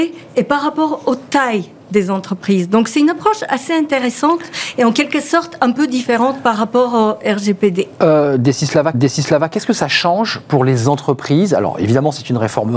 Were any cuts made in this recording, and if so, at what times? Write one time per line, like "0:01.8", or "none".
0:08.9

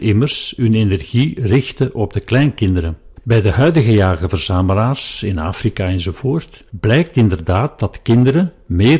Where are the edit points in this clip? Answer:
0:03.2
0:06.7

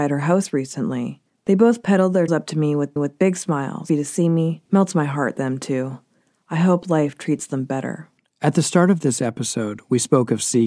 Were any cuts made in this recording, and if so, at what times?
0:02.3
0:03.0
0:03.9
0:04.7

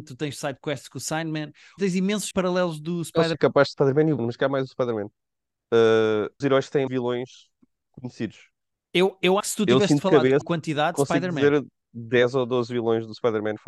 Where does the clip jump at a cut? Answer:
0:01.8
0:02.3
0:03.3
0:03.7
0:04.2
0:06.4
0:06.9
0:09.4
0:10.4

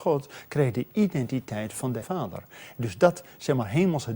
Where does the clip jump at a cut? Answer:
0:02.0

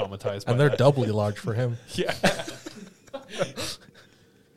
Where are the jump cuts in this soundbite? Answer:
none

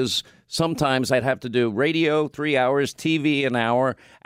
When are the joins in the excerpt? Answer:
none

